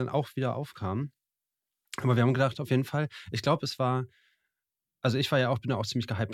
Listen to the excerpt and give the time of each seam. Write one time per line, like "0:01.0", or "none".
none